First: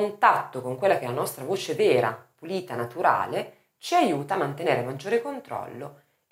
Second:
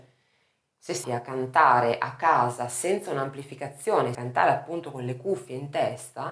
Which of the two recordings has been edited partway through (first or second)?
second